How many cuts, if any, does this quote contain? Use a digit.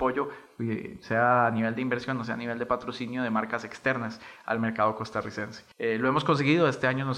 1